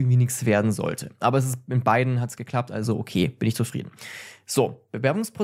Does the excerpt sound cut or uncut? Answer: uncut